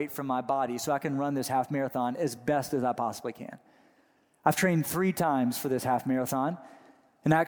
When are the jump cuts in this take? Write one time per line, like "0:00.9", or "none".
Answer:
none